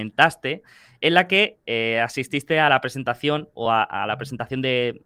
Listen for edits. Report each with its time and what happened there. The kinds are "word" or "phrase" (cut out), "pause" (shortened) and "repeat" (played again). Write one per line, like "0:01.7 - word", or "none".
none